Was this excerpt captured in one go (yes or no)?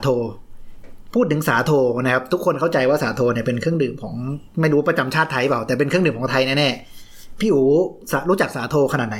no